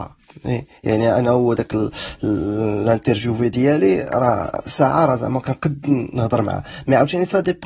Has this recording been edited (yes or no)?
no